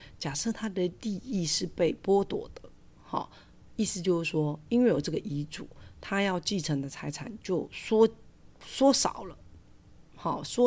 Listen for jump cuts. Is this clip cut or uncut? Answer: uncut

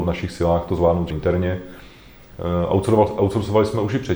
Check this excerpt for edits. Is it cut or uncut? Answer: cut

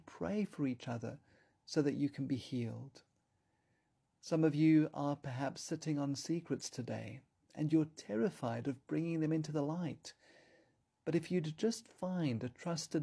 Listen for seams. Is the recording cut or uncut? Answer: uncut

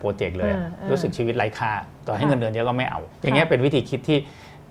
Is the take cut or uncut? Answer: cut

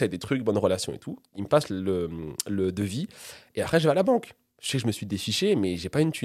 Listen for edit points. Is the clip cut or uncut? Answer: uncut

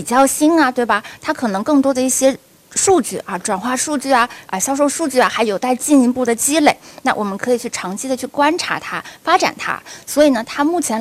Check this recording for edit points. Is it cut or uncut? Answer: uncut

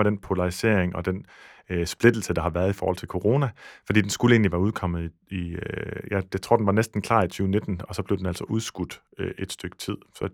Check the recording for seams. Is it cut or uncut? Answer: uncut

